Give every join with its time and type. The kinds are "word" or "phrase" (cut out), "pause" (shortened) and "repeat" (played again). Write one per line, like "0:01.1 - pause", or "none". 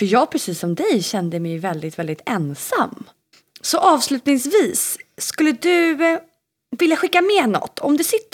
none